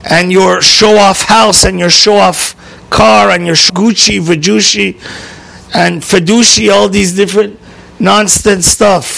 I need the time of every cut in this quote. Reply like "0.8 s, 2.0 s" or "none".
3.7 s

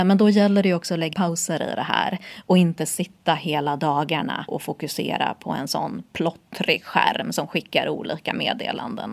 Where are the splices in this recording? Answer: 1.1 s, 4.5 s

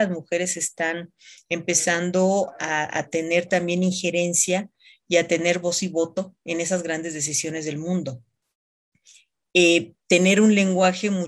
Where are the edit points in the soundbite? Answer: none

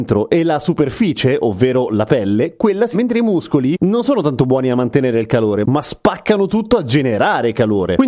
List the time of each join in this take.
2.9 s

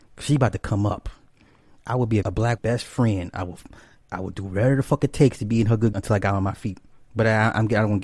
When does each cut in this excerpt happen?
2.2 s, 2.6 s, 5.9 s

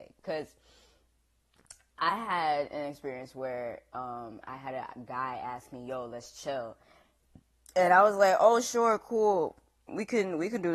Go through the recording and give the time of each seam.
none

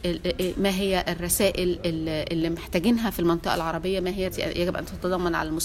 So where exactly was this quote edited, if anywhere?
4.3 s

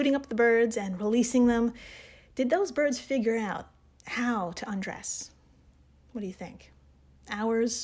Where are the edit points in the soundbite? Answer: none

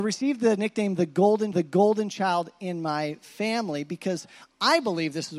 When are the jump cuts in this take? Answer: 1.5 s

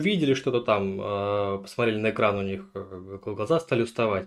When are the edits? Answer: none

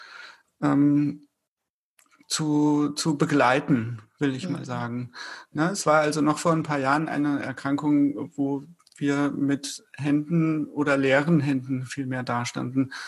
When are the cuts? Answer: none

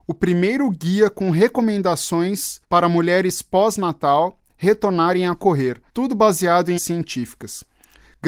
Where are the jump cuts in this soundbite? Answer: 2.6 s, 5.9 s, 6.8 s

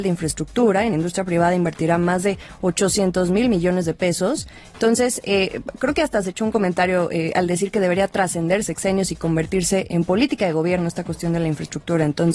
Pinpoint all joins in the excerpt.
0.9 s, 9.9 s

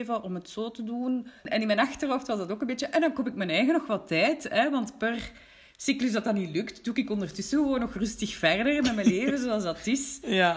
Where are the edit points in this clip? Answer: 1.4 s

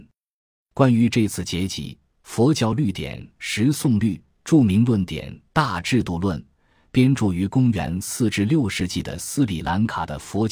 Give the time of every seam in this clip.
none

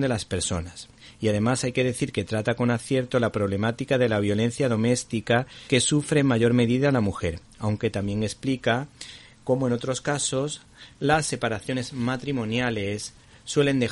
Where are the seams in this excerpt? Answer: 1.0 s, 5.7 s

